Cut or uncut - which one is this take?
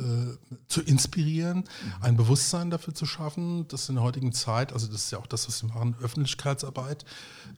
uncut